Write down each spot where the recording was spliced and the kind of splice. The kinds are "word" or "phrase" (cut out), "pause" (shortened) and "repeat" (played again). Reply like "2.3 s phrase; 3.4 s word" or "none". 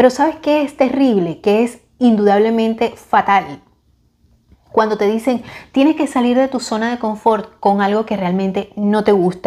none